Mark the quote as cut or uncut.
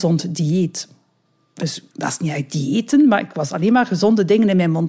cut